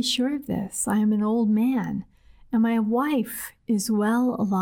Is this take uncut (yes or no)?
yes